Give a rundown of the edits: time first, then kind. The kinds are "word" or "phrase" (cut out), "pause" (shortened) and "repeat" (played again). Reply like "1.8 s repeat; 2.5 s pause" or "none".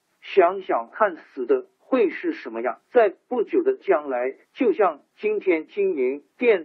2.8 s pause; 4.4 s pause